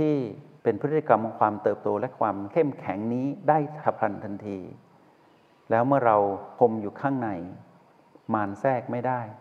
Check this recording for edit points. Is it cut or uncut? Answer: uncut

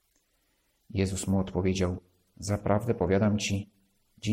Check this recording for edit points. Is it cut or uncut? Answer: uncut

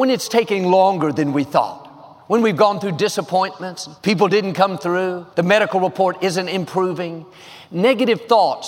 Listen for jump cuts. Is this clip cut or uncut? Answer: cut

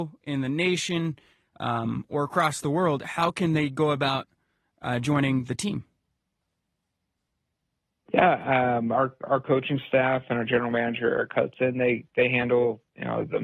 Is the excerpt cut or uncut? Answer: uncut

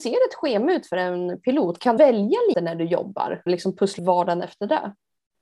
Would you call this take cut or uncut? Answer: cut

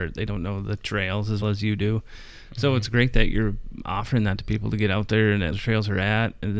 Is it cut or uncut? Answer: cut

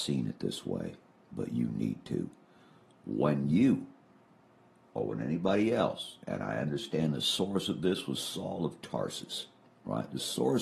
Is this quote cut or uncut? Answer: uncut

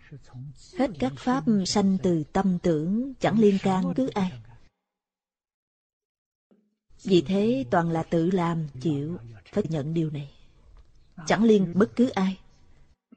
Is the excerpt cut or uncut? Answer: cut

